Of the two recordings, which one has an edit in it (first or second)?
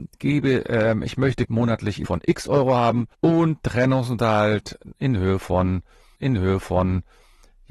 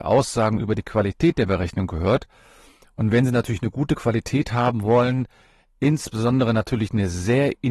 first